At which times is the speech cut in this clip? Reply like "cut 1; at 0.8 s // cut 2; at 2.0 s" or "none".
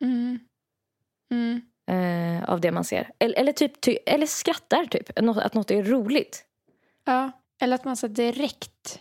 none